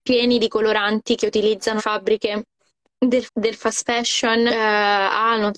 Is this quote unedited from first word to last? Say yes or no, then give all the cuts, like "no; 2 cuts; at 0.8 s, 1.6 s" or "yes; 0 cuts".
no; 3 cuts; at 1.8 s, 3.3 s, 4.5 s